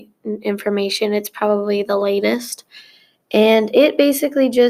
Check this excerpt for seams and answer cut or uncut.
uncut